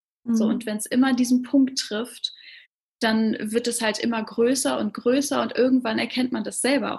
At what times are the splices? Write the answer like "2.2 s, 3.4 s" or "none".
none